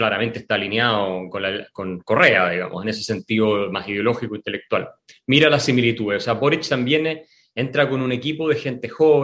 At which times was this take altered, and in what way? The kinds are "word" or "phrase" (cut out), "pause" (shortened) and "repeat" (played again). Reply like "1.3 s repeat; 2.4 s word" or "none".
none